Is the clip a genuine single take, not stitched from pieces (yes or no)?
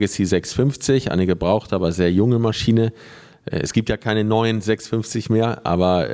yes